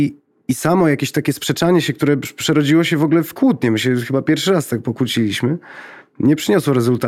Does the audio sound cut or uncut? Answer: uncut